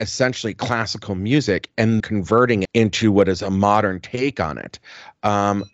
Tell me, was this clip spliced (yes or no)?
yes